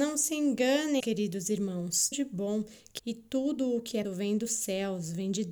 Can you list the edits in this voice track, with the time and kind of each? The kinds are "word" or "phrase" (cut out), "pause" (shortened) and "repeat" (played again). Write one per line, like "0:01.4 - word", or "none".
0:01.0 - word
0:02.1 - word
0:03.0 - word
0:04.0 - word